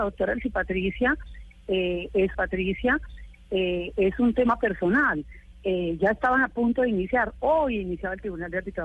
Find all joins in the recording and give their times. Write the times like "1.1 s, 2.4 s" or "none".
2.3 s